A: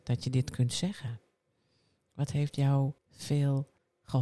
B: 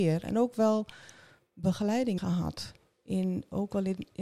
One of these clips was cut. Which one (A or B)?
B